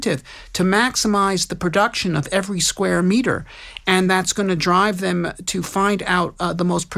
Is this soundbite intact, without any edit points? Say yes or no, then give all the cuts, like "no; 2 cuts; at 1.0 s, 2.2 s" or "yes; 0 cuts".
yes; 0 cuts